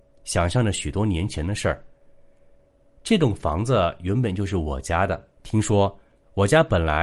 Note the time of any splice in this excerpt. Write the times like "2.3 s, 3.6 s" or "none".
5.3 s